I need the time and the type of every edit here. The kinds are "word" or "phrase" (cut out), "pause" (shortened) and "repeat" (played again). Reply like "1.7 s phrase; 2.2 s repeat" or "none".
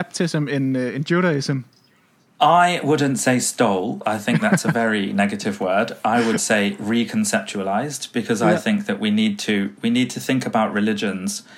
none